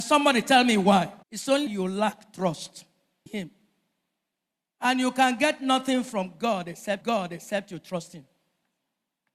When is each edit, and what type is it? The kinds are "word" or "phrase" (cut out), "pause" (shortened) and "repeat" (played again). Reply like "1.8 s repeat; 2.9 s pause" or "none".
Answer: 1.2 s pause; 1.7 s word; 3.3 s word; 7.0 s repeat